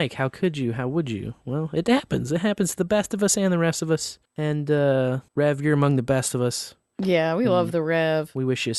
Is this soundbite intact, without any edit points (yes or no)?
no